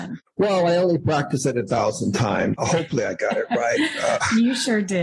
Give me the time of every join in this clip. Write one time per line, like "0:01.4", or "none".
0:02.5